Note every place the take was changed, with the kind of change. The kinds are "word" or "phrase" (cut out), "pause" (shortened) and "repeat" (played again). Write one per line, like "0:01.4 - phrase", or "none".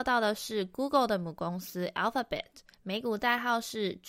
0:02.7 - pause